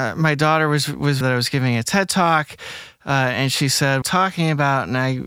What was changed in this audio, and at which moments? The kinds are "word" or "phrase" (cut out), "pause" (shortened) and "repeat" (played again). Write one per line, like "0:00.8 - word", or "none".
0:01.2 - phrase
0:04.0 - phrase